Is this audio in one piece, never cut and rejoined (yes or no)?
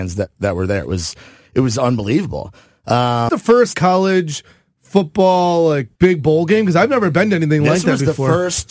no